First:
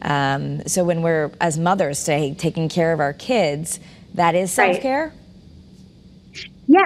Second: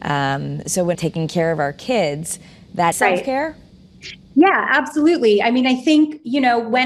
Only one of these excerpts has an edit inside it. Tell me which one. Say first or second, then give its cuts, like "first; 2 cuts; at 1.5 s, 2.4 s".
second; 3 cuts; at 0.9 s, 2.9 s, 3.7 s